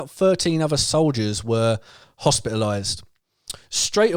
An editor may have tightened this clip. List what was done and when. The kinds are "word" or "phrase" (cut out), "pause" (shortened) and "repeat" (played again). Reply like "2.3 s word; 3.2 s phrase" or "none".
none